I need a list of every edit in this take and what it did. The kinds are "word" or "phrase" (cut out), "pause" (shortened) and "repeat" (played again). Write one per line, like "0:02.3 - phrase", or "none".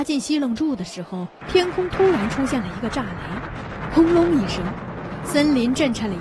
0:01.4 - pause